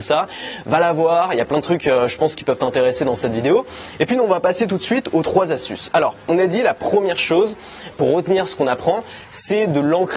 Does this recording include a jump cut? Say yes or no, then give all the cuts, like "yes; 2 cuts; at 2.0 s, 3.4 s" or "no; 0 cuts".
yes; 1 cut; at 7.9 s